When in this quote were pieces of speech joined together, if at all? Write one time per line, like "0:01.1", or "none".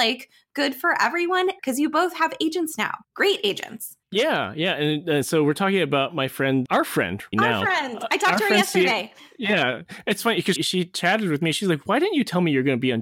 0:01.6
0:03.0
0:04.0
0:06.7
0:07.3
0:10.6